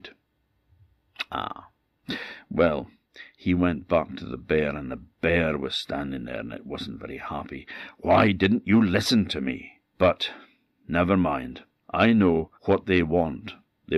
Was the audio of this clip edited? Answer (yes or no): yes